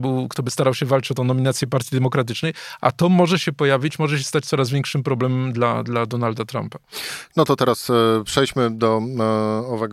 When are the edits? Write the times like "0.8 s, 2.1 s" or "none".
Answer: 1.2 s

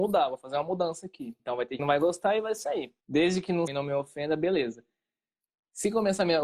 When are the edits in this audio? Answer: 1.4 s, 1.8 s, 3.0 s, 3.7 s

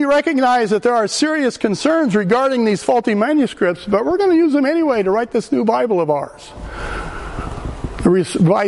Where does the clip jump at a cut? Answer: none

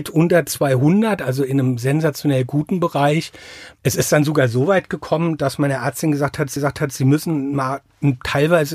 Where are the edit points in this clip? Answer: 6.6 s

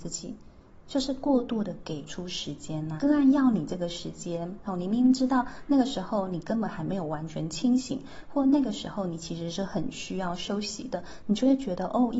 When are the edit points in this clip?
3.0 s

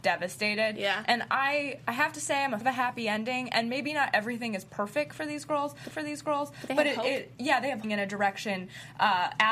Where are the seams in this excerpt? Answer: 2.6 s, 5.9 s, 7.8 s

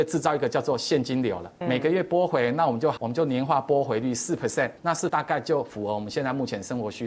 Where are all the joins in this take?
1.6 s, 3.0 s, 4.8 s, 5.1 s

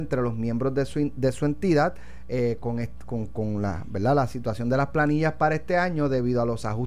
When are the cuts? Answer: none

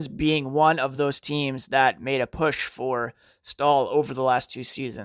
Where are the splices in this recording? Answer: none

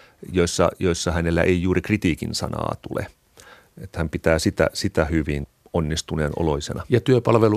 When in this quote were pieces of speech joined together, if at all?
none

